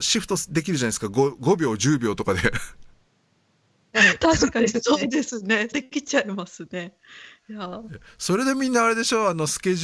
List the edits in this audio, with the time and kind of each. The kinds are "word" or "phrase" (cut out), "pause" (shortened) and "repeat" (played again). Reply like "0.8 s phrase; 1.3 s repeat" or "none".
5.7 s phrase